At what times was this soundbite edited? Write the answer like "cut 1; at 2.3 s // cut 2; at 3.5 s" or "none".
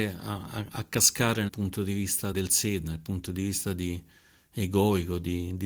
cut 1; at 1.5 s // cut 2; at 2.3 s